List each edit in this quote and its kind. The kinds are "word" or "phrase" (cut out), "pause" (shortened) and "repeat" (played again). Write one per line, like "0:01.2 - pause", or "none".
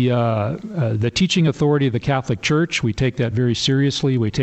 none